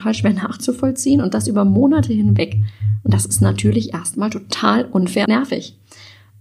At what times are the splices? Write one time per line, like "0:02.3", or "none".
0:05.3